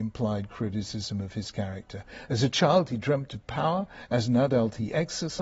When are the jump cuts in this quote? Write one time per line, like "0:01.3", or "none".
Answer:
none